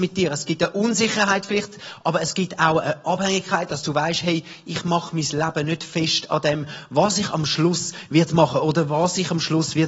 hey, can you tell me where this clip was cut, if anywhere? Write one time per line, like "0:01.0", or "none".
none